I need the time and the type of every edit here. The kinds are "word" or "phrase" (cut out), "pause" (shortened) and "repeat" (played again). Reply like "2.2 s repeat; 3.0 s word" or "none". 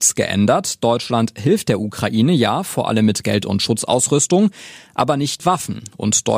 5.4 s word